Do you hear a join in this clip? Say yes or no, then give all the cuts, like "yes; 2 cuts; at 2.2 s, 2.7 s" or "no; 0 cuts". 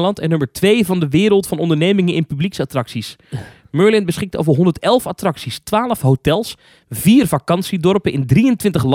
no; 0 cuts